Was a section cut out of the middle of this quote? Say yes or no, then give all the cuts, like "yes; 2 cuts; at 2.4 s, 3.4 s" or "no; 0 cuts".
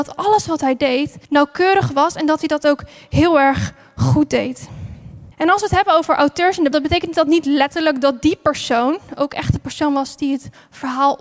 yes; 3 cuts; at 1.2 s, 5.3 s, 6.7 s